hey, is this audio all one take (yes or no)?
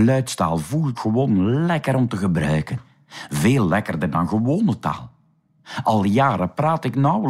no